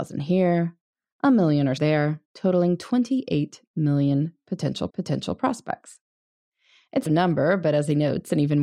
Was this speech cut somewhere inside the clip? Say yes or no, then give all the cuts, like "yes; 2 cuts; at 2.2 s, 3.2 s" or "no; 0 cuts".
yes; 4 cuts; at 1.8 s, 2.3 s, 4.9 s, 7.1 s